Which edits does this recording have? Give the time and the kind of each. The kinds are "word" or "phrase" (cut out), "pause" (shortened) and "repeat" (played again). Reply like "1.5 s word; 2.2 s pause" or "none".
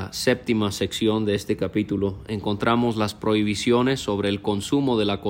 none